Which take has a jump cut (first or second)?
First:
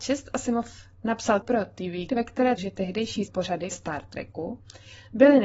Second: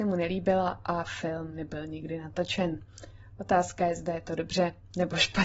first